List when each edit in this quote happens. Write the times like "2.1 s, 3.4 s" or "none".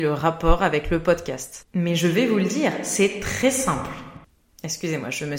none

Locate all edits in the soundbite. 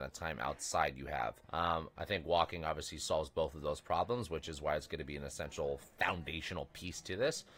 1.4 s

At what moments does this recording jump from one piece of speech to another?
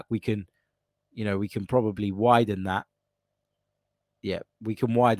none

